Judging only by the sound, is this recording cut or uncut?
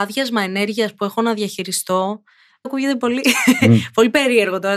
cut